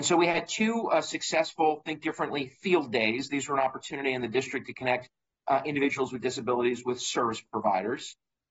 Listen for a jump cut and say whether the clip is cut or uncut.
uncut